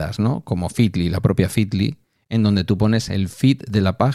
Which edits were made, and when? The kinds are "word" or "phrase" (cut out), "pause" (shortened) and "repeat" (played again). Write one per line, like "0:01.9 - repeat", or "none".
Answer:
0:02.2 - pause